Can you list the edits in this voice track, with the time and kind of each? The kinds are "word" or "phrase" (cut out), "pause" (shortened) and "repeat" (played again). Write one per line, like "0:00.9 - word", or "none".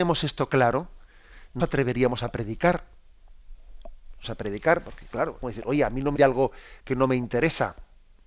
0:01.6 - word
0:04.2 - word
0:05.4 - word
0:06.1 - word